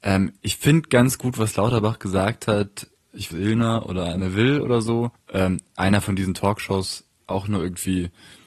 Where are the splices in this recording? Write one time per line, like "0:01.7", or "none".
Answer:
0:03.3
0:05.1